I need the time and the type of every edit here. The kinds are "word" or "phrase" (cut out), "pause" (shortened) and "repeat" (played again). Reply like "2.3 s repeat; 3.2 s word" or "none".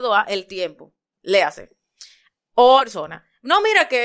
2.8 s phrase